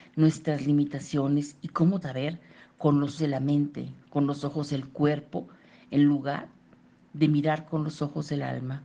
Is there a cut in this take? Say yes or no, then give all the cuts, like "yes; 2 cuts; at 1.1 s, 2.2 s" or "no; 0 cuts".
yes; 2 cuts; at 2.0 s, 3.2 s